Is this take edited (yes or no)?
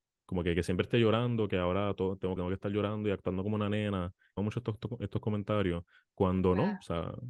yes